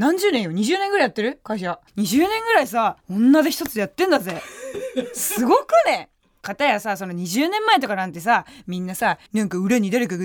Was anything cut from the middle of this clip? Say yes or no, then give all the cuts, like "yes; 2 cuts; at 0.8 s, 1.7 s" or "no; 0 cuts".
yes; 4 cuts; at 1.9 s, 3.0 s, 6.4 s, 9.3 s